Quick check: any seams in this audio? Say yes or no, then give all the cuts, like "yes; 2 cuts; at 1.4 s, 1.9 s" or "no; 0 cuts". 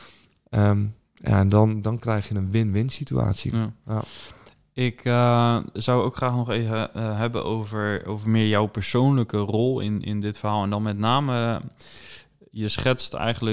no; 0 cuts